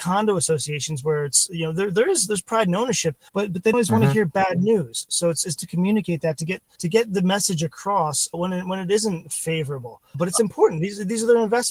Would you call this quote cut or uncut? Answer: cut